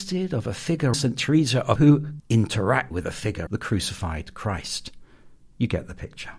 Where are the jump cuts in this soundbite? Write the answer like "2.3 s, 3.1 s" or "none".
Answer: 0.9 s, 1.8 s, 2.2 s, 2.9 s, 3.5 s